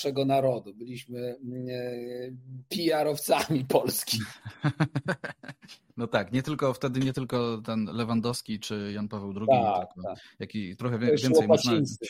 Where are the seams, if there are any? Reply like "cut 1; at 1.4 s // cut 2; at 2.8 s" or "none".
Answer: none

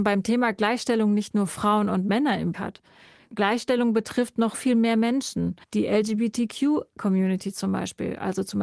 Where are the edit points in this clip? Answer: cut 1; at 2.5 s // cut 2; at 4.5 s // cut 3; at 5.6 s

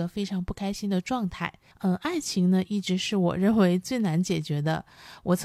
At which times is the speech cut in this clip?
cut 1; at 1.7 s

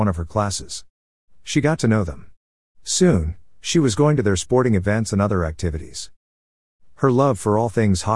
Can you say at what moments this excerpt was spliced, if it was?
none

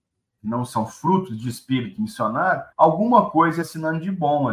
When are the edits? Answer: cut 1; at 2.7 s // cut 2; at 3.6 s

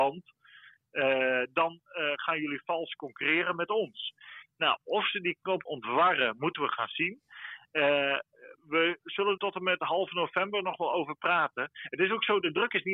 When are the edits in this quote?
cut 1; at 5.7 s // cut 2; at 8.6 s // cut 3; at 9.4 s

